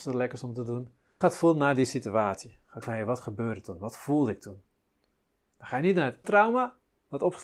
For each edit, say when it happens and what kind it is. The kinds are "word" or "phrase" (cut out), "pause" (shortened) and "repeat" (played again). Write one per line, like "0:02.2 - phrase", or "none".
0:01.2 - word
0:02.8 - word
0:06.2 - word